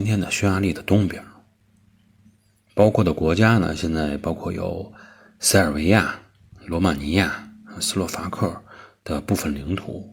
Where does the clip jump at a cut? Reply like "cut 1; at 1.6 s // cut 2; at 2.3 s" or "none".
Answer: none